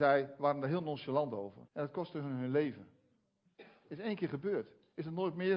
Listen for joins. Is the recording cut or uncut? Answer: cut